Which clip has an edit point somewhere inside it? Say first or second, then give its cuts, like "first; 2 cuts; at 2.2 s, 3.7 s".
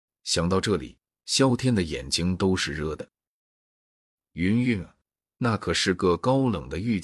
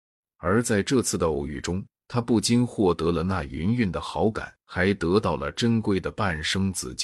second; 2 cuts; at 1.9 s, 4.6 s